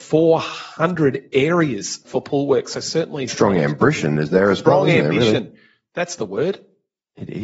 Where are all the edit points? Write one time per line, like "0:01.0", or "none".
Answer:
0:02.0
0:03.3